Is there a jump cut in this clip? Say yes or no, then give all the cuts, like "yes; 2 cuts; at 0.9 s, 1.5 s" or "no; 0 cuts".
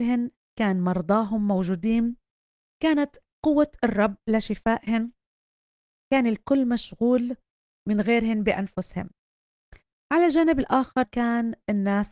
yes; 1 cut; at 11.0 s